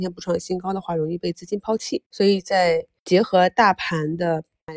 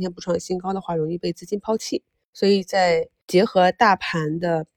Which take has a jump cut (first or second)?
first